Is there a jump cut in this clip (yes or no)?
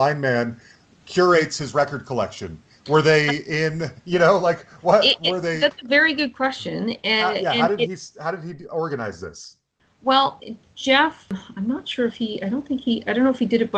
no